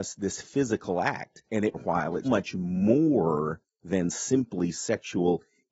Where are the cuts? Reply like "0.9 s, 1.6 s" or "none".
1.7 s, 2.2 s